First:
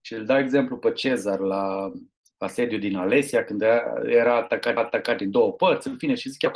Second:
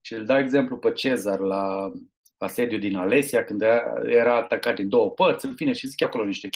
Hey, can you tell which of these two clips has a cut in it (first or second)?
first